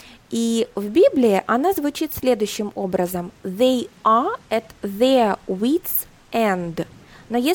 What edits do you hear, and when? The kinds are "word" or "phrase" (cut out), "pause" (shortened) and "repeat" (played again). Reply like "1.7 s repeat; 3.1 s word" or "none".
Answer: none